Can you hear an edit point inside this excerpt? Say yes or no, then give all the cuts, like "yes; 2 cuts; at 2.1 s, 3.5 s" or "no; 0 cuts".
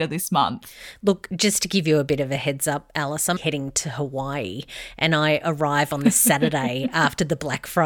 yes; 1 cut; at 3.4 s